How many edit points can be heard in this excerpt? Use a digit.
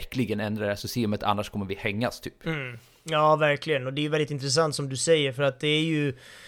0